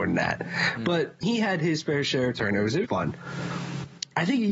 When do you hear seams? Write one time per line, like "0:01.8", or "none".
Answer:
0:01.2
0:02.8